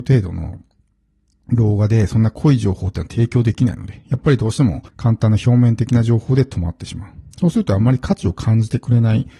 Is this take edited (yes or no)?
yes